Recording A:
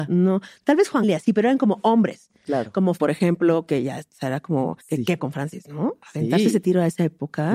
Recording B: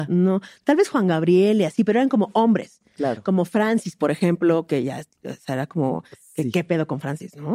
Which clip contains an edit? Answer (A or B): A